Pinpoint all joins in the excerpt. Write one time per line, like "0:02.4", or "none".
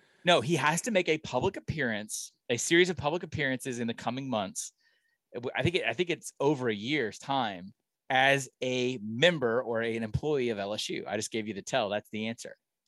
0:02.4
0:07.9